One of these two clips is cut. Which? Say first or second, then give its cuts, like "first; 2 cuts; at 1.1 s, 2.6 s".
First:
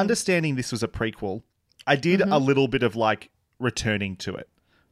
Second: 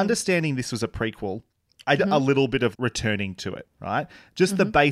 second; 3 cuts; at 2.0 s, 2.7 s, 3.7 s